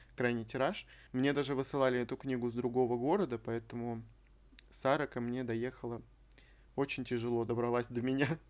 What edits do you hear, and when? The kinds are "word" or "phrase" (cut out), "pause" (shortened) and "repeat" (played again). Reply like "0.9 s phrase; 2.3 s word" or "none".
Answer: none